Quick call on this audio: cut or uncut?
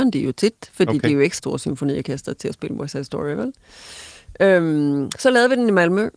cut